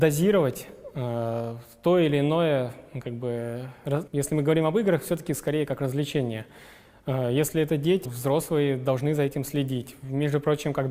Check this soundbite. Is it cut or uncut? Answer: cut